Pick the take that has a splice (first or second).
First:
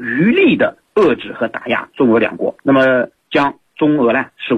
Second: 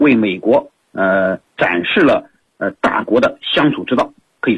first